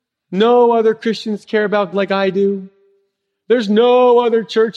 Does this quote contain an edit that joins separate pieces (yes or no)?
yes